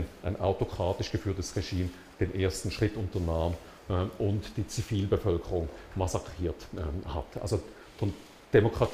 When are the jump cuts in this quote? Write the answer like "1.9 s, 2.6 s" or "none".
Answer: none

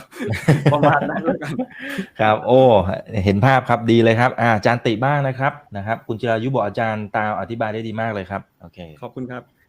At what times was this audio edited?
5.7 s, 8.5 s

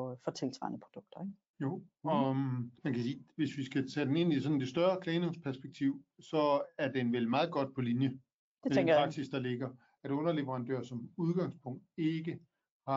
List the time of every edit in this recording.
2.8 s

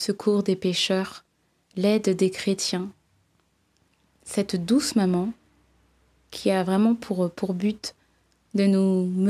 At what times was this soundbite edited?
none

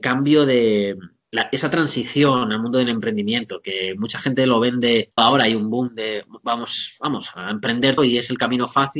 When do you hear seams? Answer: 5.2 s, 8.0 s

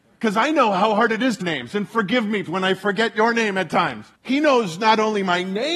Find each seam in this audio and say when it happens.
1.4 s, 2.5 s, 4.2 s

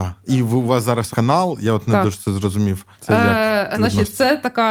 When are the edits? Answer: 1.1 s, 2.9 s, 3.7 s

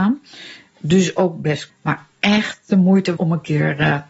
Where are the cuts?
1.7 s, 3.2 s

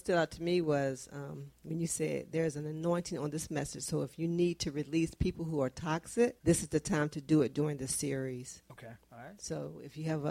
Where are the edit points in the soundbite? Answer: 1.5 s, 6.4 s, 9.0 s

